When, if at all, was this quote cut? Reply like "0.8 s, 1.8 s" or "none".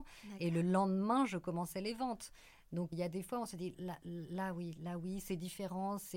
2.9 s, 3.7 s